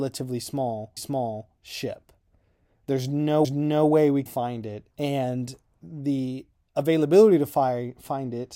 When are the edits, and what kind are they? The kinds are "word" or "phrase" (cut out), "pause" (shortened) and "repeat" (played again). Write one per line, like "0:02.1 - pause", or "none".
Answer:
0:01.0 - repeat
0:03.4 - repeat
0:04.3 - word
0:04.9 - pause
0:06.5 - pause